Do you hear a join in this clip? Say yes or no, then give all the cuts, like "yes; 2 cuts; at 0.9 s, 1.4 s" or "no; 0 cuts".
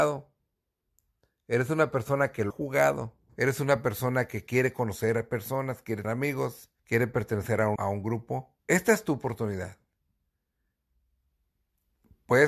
yes; 6 cuts; at 2.5 s, 3.3 s, 6.0 s, 6.8 s, 7.8 s, 8.6 s